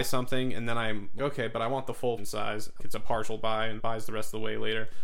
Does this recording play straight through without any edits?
no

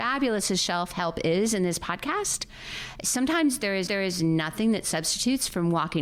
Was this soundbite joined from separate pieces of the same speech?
yes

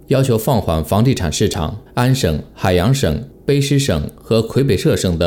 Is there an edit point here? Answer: yes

